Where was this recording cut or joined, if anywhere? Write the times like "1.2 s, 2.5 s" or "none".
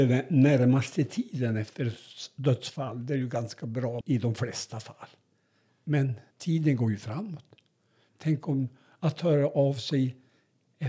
4.0 s, 6.3 s